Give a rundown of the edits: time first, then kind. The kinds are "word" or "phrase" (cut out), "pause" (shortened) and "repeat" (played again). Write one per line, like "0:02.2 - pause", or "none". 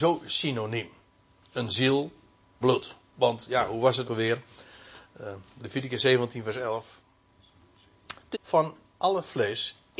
0:02.6 - word
0:04.0 - word
0:05.6 - word
0:08.3 - word